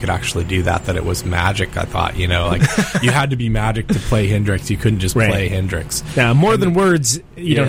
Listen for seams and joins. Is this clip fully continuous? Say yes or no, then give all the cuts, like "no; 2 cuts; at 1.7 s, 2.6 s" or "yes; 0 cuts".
yes; 0 cuts